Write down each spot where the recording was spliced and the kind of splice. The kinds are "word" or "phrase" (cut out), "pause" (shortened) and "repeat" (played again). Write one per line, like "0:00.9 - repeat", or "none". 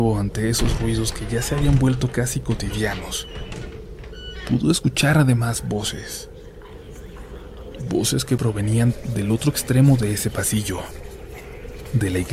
none